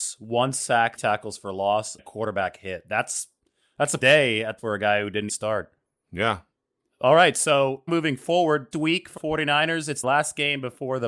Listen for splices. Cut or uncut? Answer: cut